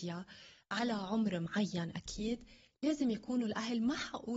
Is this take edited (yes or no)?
no